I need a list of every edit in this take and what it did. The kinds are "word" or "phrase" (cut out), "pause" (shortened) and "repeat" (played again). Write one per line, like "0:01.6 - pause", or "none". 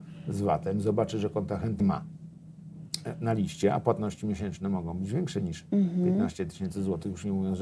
0:01.8 - word